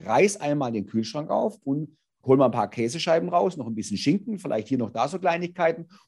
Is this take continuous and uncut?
yes; 0 cuts

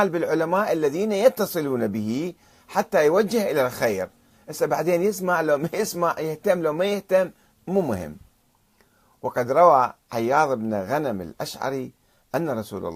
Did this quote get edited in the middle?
no; 0 cuts

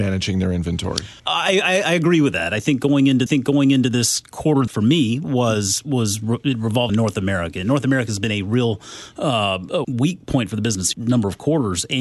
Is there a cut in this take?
yes; 6 cuts; at 1.2 s, 3.3 s, 4.7 s, 6.9 s, 9.8 s, 10.9 s

